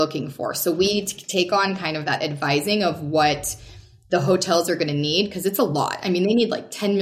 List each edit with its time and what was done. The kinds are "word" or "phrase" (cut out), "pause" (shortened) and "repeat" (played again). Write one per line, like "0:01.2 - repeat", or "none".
none